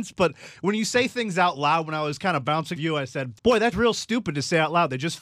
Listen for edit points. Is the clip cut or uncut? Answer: cut